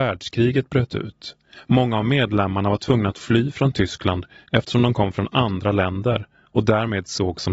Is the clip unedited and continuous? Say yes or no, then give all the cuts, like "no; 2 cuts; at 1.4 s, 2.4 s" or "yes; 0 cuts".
yes; 0 cuts